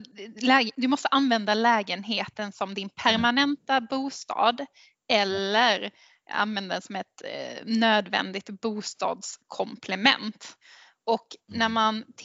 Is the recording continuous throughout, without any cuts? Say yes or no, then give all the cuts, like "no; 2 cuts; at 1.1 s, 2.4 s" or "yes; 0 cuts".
yes; 0 cuts